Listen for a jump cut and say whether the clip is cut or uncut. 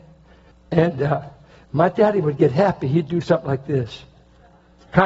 uncut